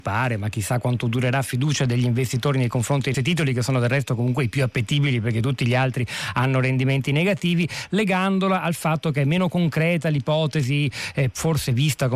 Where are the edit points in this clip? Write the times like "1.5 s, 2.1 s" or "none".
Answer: 3.1 s